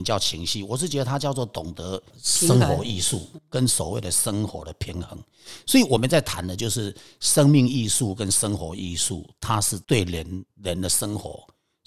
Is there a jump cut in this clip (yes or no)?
yes